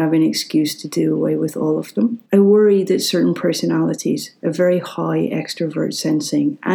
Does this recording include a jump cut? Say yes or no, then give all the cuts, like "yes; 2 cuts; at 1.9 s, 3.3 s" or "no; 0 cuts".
yes; 1 cut; at 2.3 s